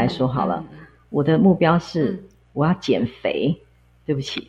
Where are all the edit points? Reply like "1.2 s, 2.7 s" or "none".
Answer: none